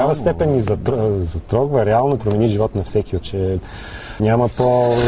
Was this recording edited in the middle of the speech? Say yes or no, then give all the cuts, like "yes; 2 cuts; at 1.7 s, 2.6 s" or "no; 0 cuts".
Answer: yes; 3 cuts; at 2.2 s, 3.2 s, 4.2 s